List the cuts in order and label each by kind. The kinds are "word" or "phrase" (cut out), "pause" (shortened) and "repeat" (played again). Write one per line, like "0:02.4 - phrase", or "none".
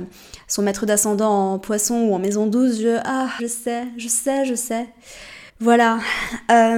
0:03.4 - phrase
0:05.5 - pause